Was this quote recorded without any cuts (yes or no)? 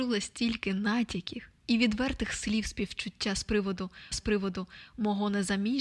no